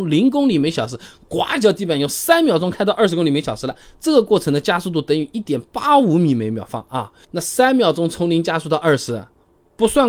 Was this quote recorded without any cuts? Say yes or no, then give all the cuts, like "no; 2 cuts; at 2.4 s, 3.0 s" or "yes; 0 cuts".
yes; 0 cuts